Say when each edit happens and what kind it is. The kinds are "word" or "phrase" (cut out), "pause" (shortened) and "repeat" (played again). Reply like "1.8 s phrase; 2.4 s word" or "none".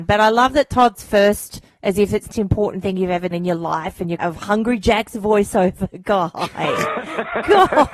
0.9 s word; 2.3 s word; 3.3 s word; 4.2 s word